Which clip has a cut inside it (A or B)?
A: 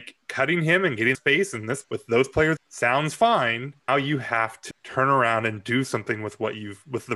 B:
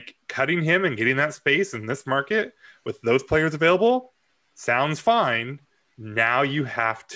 A